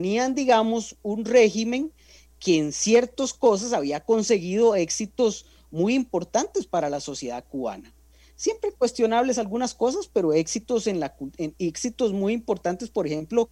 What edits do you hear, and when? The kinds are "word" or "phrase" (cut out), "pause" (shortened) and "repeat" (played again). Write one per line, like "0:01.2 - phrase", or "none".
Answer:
none